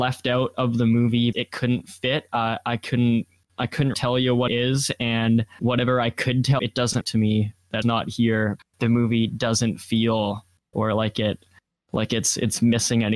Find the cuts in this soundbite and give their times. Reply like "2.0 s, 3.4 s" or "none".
1.3 s, 3.9 s, 4.5 s, 5.6 s, 6.6 s, 7.0 s, 7.8 s, 8.6 s, 10.7 s